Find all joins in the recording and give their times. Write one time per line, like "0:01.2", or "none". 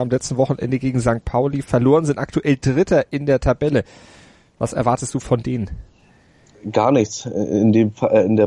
none